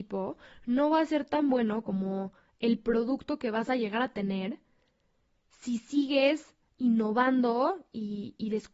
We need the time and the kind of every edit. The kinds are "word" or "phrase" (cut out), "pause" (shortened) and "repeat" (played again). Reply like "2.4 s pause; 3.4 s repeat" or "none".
none